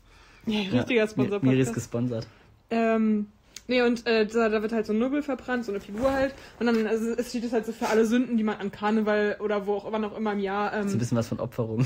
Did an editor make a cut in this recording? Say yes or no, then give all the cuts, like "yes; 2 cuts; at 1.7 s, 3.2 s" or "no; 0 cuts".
no; 0 cuts